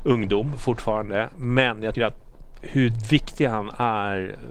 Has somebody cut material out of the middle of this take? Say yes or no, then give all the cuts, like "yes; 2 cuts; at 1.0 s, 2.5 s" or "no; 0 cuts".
yes; 2 cuts; at 1.9 s, 2.6 s